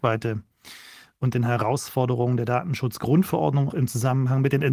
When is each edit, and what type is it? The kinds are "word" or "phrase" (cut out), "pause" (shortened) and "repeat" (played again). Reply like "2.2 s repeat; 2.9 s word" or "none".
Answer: 3.7 s word